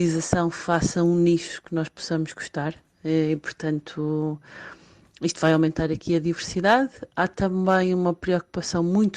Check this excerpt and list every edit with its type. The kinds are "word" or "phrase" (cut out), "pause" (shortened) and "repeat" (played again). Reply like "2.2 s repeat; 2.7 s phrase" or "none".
none